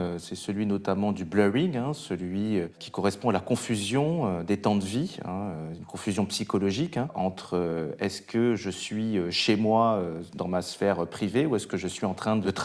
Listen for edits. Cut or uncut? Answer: uncut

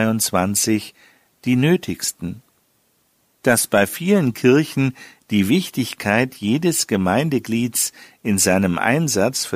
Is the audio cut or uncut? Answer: uncut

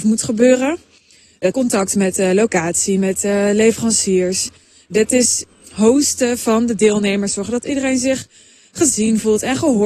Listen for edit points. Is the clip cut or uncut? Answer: cut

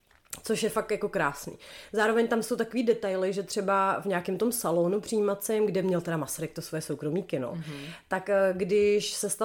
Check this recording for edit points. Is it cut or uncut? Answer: uncut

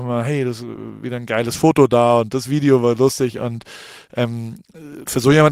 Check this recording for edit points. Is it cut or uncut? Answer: uncut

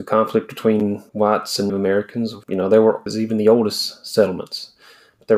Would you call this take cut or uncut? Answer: cut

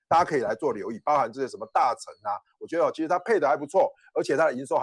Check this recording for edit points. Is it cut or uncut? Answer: uncut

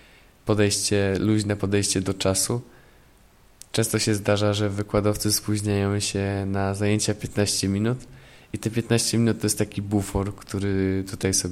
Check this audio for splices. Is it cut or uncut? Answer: uncut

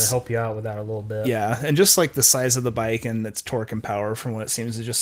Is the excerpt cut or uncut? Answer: uncut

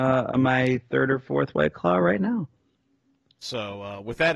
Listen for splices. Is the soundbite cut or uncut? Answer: uncut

